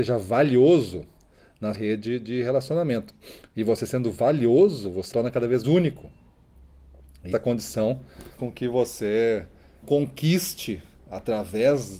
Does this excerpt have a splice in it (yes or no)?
yes